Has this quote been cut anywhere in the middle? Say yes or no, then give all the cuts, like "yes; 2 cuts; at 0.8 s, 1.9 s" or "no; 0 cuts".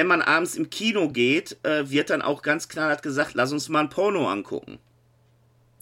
no; 0 cuts